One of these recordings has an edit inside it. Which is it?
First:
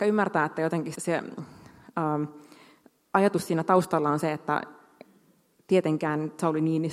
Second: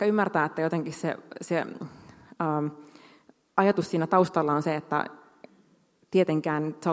first; 1 cut; at 1.0 s

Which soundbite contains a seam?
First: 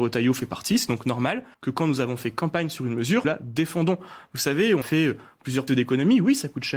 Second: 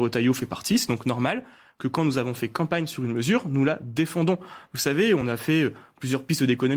first; 4 cuts; at 1.5 s, 3.2 s, 4.8 s, 5.7 s

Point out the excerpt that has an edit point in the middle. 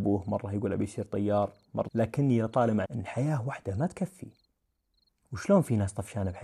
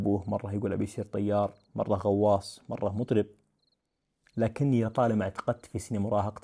first; 2 cuts; at 1.9 s, 2.8 s

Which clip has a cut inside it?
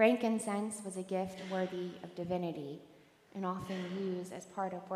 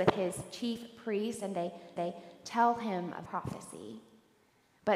second; 2 cuts; at 2.0 s, 3.3 s

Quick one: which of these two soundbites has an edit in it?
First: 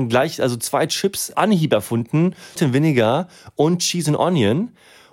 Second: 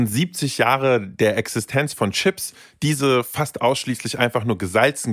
first; 2 cuts; at 1.3 s, 2.6 s

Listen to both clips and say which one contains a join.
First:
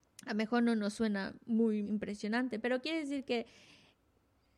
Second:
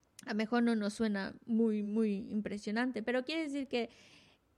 first; 1 cut; at 1.8 s

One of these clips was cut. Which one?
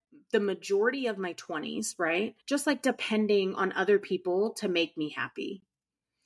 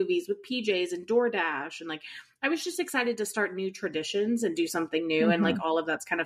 first; 1 cut; at 2.4 s

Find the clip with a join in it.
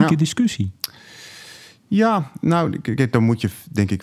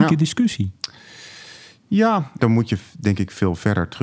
second; 1 cut; at 2.4 s

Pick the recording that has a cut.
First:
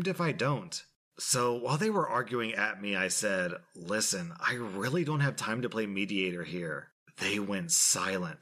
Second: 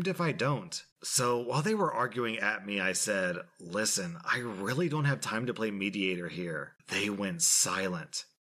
second; 2 cuts; at 0.9 s, 6.8 s

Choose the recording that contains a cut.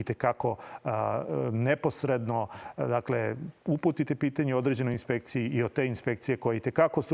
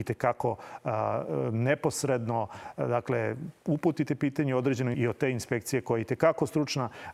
second; 1 cut; at 4.9 s

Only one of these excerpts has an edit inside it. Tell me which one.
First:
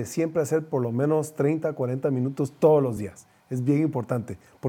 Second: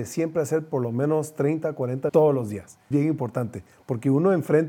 second; 2 cuts; at 2.1 s, 2.9 s

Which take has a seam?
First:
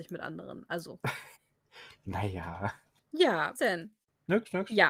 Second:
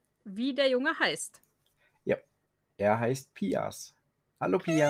first; 2 cuts; at 1.3 s, 3.6 s

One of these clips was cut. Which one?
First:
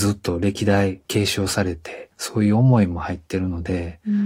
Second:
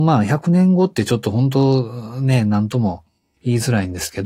first; 2 cuts; at 1.1 s, 2.1 s

